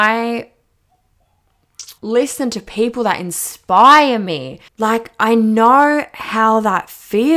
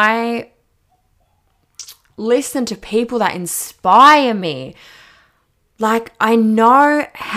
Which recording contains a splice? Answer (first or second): first